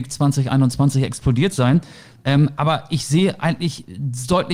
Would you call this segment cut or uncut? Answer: uncut